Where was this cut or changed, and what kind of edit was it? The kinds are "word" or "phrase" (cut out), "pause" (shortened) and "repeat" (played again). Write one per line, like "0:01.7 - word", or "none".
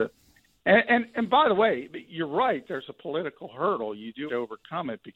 0:04.3 - word